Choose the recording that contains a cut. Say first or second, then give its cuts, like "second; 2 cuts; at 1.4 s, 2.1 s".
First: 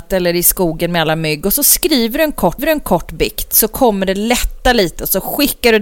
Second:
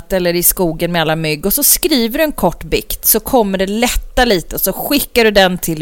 first; 1 cut; at 2.6 s